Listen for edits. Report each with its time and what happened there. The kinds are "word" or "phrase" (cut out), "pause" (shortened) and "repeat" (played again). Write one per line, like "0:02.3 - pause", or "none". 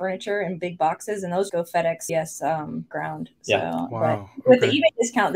0:01.5 - word
0:02.1 - word

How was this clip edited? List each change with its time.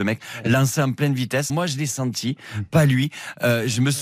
0:01.5 - word

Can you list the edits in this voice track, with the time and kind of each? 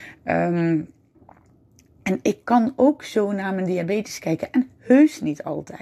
none

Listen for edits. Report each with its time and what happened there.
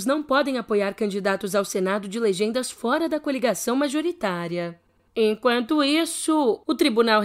none

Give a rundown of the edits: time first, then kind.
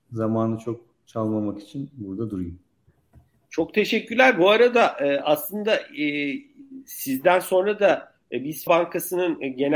0:08.7 - word

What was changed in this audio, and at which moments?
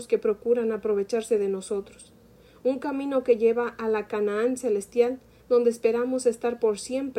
none

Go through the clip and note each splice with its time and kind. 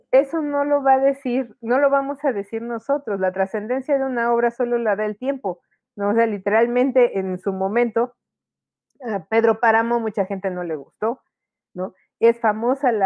none

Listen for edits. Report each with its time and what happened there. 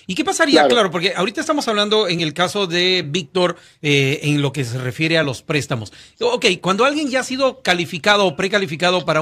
none

